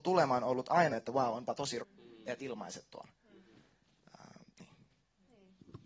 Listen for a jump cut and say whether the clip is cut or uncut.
cut